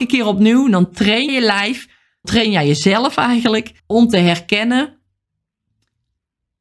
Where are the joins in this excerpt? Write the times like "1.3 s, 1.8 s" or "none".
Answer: 1.3 s, 2.2 s, 3.8 s

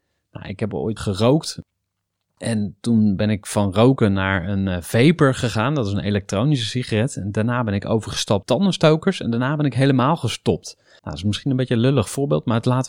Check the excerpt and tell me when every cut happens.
1.0 s, 8.4 s, 11.0 s

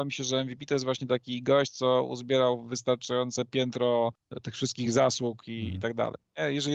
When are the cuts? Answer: none

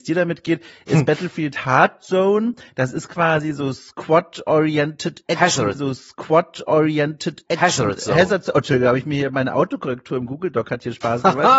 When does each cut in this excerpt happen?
5.7 s

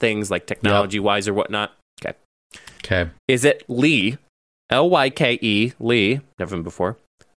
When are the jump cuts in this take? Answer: 3.2 s, 3.6 s, 5.1 s, 6.5 s

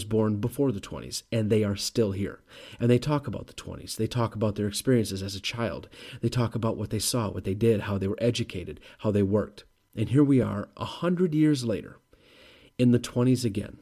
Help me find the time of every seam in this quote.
none

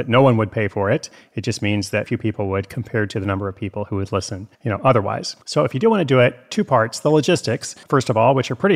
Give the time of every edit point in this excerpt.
2.0 s, 4.5 s, 5.4 s, 7.8 s

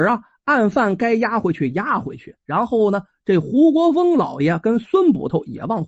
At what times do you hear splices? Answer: 2.4 s

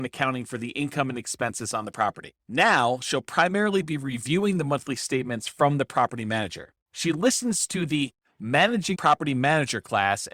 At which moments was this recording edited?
2.4 s, 6.8 s, 8.9 s

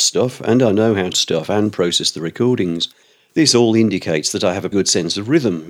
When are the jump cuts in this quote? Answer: 1.1 s, 3.1 s, 4.7 s

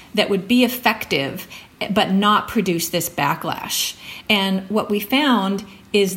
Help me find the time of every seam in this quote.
none

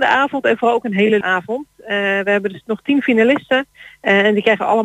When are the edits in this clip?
1.2 s

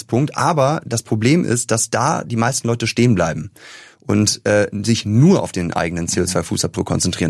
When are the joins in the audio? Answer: none

